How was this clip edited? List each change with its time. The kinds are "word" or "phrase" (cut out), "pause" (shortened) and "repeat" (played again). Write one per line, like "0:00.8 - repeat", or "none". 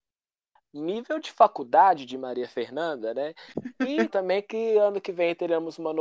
0:04.1 - word